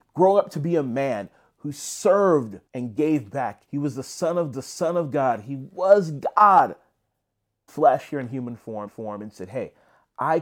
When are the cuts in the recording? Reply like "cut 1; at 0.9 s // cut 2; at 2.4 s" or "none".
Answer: cut 1; at 2.7 s // cut 2; at 3.7 s // cut 3; at 4.5 s // cut 4; at 7.7 s // cut 5; at 8.9 s